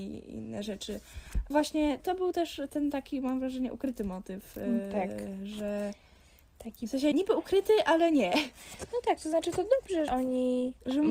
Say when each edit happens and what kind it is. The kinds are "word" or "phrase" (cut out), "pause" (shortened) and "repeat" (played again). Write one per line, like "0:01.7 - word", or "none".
0:01.5 - word
0:02.0 - word
0:07.1 - word
0:10.1 - word